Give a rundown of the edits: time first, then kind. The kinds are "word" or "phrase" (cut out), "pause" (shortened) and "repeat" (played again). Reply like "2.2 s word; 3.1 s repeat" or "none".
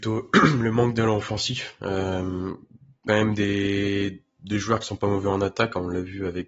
3.1 s phrase